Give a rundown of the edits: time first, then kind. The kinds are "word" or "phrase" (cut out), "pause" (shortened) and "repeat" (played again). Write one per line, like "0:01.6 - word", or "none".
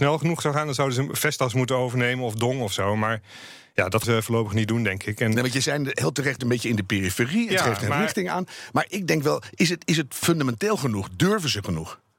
0:04.0 - word
0:06.4 - word